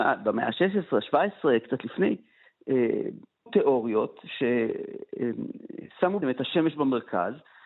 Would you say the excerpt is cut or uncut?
cut